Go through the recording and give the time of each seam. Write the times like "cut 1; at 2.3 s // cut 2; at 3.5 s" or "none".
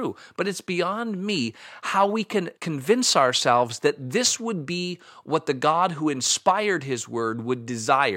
cut 1; at 2.6 s